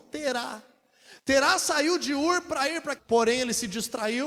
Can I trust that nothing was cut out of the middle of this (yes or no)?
no